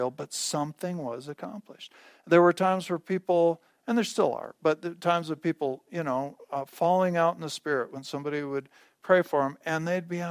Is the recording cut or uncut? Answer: uncut